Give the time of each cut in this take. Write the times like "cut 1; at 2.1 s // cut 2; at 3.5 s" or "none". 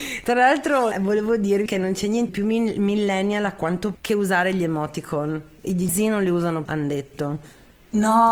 cut 1; at 0.9 s // cut 2; at 1.7 s // cut 3; at 2.3 s // cut 4; at 3.9 s // cut 5; at 5.9 s // cut 6; at 6.6 s